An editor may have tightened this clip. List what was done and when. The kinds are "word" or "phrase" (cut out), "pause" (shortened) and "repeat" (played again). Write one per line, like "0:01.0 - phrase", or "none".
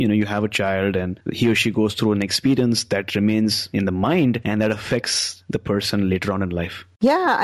none